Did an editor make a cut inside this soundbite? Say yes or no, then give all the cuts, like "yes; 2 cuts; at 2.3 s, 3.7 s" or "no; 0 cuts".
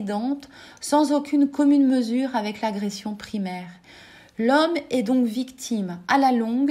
no; 0 cuts